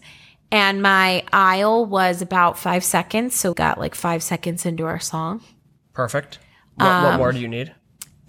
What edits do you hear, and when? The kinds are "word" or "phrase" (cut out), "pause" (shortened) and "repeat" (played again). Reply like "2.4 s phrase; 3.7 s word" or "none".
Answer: 3.5 s word